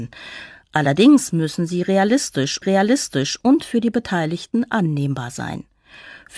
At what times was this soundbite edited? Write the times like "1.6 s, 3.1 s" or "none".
2.6 s